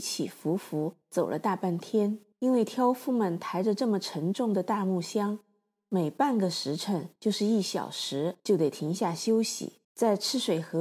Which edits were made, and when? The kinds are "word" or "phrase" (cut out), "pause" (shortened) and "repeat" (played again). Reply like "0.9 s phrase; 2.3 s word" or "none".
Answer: 1.0 s pause; 2.3 s pause; 7.2 s pause; 8.4 s pause; 9.8 s pause